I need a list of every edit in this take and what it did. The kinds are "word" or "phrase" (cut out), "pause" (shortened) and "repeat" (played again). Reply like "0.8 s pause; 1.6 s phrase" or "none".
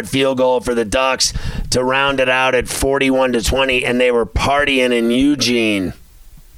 none